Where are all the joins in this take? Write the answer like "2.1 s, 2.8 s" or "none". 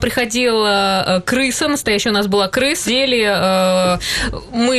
2.9 s